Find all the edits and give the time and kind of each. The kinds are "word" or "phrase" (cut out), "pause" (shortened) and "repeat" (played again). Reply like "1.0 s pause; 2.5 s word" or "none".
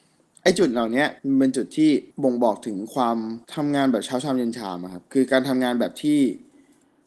1.2 s pause; 2.1 s pause; 3.4 s pause